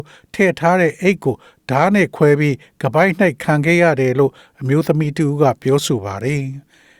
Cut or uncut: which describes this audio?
uncut